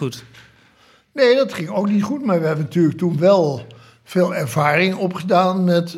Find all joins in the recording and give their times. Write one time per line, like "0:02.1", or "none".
none